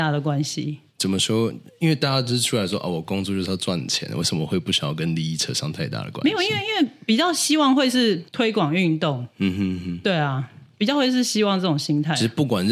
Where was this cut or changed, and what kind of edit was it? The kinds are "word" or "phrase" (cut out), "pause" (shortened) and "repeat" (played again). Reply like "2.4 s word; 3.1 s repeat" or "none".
8.3 s pause